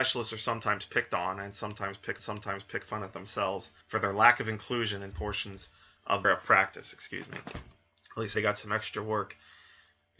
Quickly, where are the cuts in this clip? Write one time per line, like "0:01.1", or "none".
0:02.2
0:03.8
0:05.1
0:06.2
0:08.3